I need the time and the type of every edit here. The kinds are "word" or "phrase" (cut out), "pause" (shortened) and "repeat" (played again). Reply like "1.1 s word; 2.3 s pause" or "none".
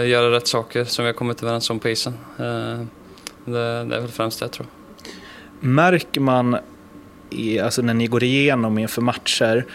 none